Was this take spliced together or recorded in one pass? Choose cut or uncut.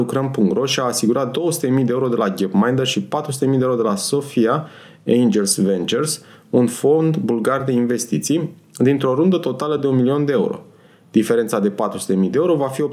uncut